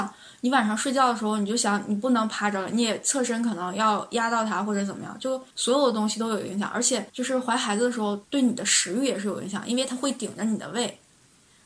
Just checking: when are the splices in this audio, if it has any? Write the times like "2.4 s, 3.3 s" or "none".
5.5 s, 7.1 s, 8.2 s